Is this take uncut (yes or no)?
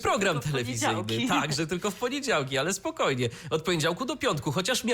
yes